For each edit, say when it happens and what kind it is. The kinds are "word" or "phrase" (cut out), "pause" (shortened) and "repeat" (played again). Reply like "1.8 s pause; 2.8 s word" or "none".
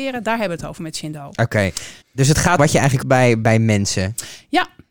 2.0 s pause; 2.6 s word; 3.0 s word; 3.4 s word